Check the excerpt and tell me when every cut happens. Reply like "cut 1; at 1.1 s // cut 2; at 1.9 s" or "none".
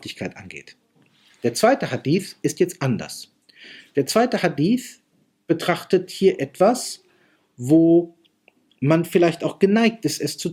none